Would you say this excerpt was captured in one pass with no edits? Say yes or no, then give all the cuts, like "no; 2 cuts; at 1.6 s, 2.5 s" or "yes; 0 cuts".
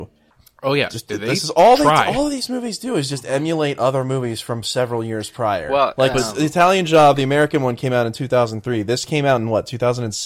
yes; 0 cuts